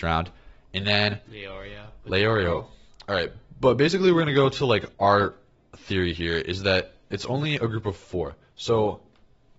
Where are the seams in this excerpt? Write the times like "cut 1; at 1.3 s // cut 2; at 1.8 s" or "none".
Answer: cut 1; at 4.9 s

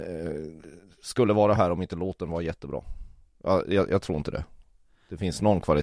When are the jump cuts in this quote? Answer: none

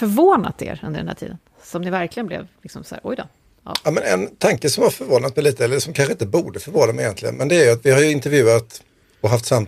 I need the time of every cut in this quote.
none

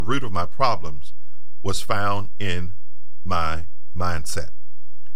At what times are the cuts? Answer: none

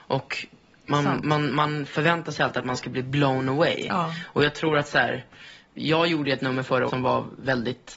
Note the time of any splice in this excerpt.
cut 1; at 6.9 s

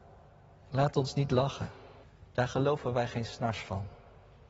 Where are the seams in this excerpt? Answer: cut 1; at 2.0 s

